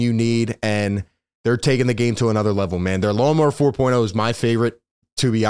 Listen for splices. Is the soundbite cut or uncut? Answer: uncut